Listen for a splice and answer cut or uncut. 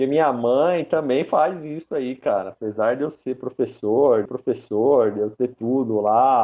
cut